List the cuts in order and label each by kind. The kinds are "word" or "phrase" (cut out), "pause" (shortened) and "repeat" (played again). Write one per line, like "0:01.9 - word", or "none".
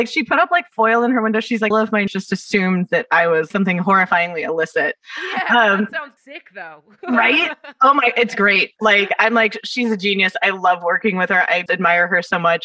0:01.7 - phrase
0:02.1 - word
0:03.5 - phrase
0:06.2 - word
0:11.7 - word